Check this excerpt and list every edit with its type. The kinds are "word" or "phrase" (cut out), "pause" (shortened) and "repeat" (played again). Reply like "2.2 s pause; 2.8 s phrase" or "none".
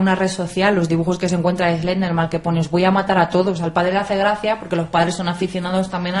none